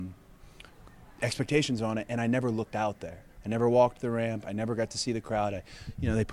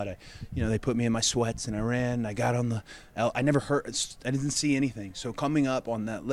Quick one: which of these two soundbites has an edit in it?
first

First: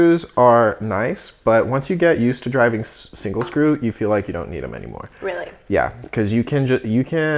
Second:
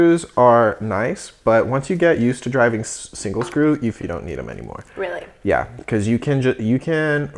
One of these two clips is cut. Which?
second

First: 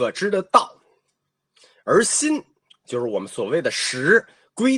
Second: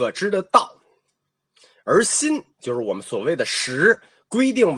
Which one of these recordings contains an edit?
second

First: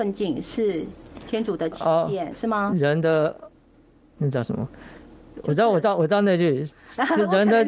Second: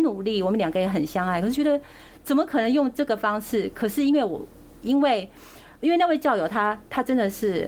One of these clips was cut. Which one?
first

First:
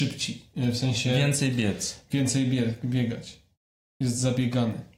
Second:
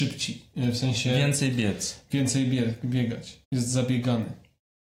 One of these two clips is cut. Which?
second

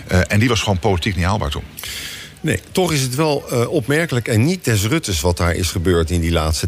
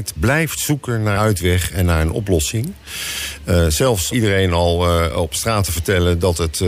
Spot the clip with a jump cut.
second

